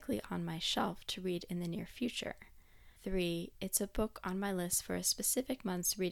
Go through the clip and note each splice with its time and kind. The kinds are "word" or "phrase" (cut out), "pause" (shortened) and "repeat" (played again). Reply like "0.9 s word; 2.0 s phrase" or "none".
3.0 s pause